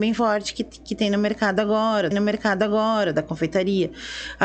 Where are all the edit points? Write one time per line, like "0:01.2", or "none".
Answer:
0:02.1